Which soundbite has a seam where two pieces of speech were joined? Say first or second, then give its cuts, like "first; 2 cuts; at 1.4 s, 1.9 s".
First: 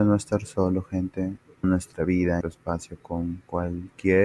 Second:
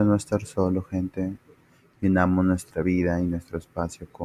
first; 2 cuts; at 1.6 s, 2.4 s